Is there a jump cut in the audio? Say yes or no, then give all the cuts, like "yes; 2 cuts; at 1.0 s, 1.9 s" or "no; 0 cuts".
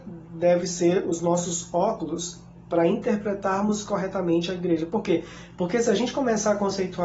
no; 0 cuts